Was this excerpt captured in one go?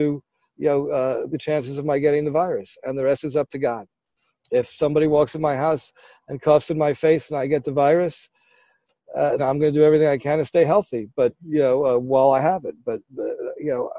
no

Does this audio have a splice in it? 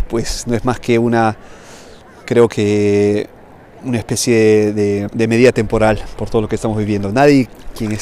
yes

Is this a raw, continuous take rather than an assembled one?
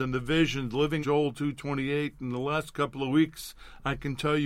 no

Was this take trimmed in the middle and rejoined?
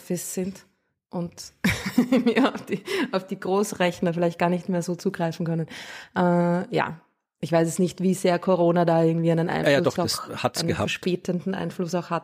no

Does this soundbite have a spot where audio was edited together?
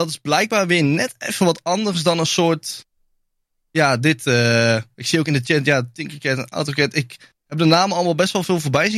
no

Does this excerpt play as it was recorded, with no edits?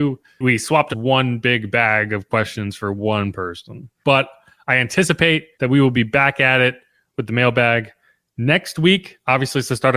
no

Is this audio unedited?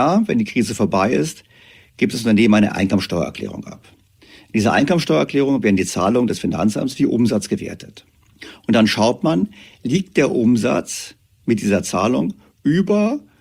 yes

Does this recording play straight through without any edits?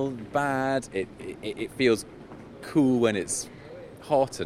yes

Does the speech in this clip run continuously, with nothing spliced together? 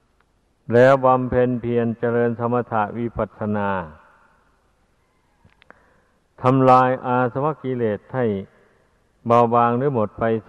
yes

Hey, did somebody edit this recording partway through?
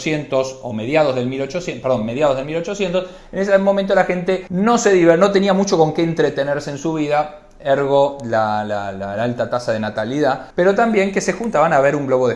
no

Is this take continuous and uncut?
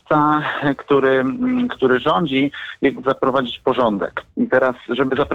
no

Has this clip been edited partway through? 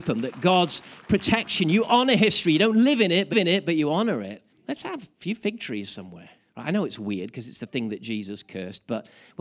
yes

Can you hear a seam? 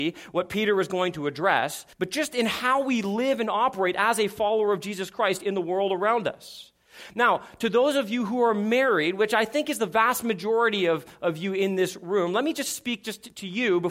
yes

